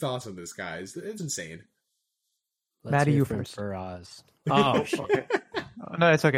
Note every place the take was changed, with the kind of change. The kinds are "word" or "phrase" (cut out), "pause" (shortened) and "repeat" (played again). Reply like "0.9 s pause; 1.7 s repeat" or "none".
1.2 s word